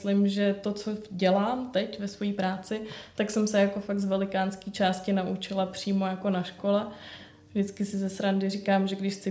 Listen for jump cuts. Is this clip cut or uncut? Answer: uncut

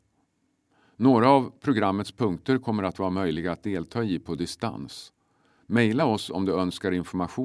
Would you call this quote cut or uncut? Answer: uncut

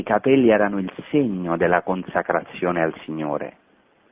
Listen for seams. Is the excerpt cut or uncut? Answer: uncut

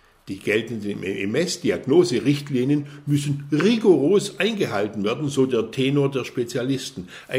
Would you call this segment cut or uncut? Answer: uncut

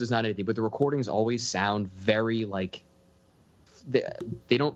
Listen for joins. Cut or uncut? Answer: uncut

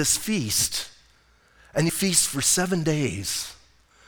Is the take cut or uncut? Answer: cut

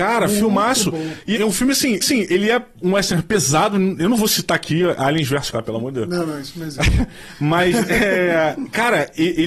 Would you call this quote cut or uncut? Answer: cut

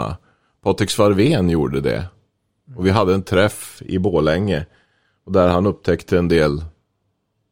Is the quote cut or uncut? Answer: uncut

